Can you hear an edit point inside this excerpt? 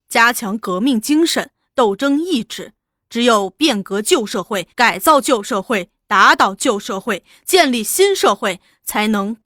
yes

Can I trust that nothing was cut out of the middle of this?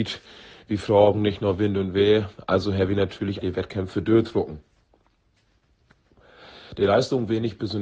no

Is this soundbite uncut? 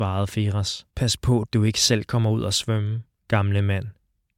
no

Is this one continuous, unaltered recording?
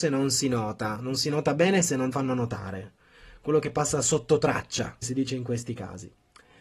no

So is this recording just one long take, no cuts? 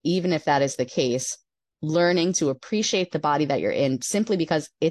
yes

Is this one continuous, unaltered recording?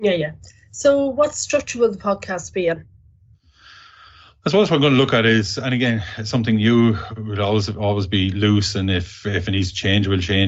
yes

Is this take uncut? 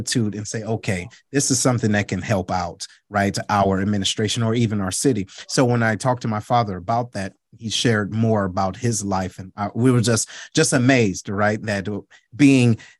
yes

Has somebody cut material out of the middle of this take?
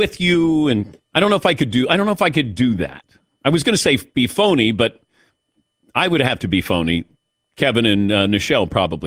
yes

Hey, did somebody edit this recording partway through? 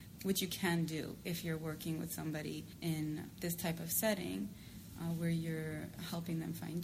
no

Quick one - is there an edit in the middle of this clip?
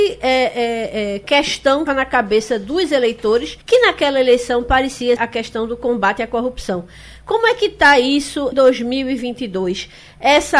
yes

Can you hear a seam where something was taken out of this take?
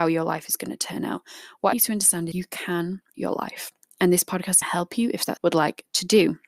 yes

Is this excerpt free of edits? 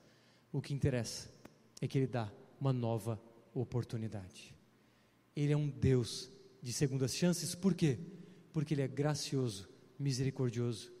yes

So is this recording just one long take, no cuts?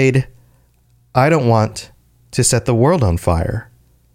yes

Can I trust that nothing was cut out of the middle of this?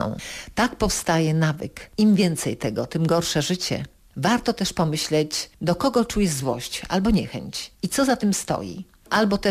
no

